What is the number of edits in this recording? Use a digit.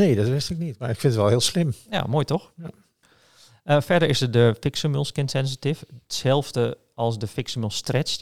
0